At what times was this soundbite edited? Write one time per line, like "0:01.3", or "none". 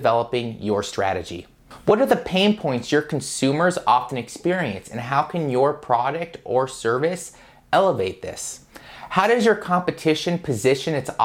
none